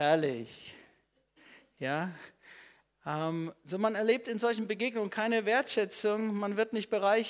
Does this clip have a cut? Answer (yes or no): no